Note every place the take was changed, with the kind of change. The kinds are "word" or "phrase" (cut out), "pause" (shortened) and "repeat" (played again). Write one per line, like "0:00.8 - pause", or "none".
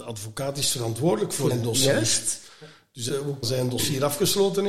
0:01.5 - word
0:03.1 - word
0:03.4 - word